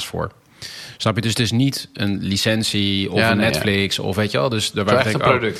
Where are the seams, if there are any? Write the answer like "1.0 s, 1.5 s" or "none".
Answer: none